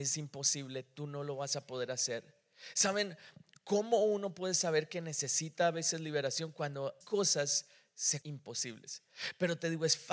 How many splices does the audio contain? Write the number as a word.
two